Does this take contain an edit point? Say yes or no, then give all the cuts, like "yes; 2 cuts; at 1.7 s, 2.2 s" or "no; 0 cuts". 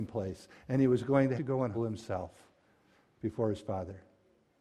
yes; 2 cuts; at 1.4 s, 1.7 s